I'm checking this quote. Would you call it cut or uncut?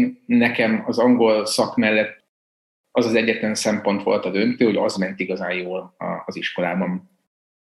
uncut